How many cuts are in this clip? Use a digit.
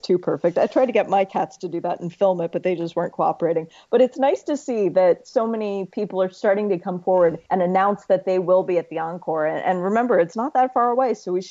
1